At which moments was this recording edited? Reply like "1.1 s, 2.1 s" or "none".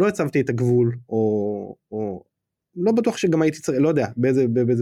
none